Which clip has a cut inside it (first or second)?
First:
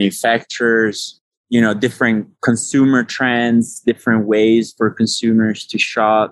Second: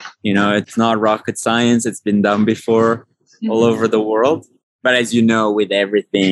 first